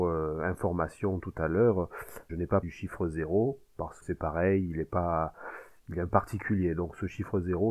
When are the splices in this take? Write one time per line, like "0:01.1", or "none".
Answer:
0:02.3
0:02.6
0:04.0
0:06.1